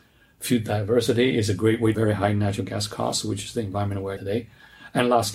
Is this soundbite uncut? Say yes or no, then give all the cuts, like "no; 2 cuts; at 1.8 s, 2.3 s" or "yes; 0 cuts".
no; 2 cuts; at 1.9 s, 4.2 s